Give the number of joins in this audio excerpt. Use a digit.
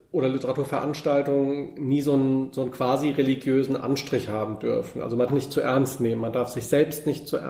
1